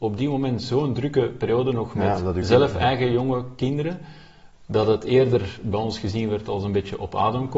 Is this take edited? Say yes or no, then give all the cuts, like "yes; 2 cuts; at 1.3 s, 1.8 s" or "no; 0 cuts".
no; 0 cuts